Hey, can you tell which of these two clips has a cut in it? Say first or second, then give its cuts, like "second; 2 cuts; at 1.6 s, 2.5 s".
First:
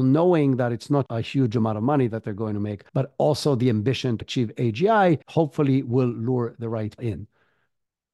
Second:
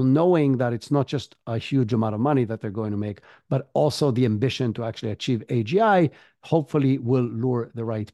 first; 5 cuts; at 1.1 s, 2.9 s, 4.2 s, 5.2 s, 7.0 s